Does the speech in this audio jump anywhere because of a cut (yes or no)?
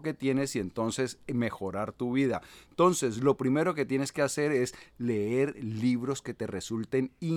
no